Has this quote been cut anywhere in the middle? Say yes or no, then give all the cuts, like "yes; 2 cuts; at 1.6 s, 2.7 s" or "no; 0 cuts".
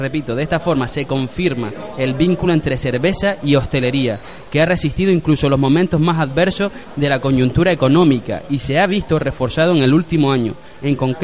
no; 0 cuts